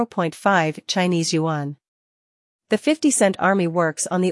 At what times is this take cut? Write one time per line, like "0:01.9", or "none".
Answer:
none